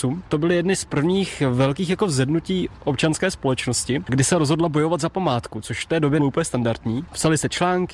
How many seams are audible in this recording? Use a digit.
1